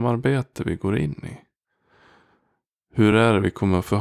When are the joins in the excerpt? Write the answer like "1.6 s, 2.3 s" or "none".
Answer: none

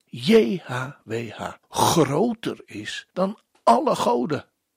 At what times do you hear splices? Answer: 1.6 s, 3.1 s

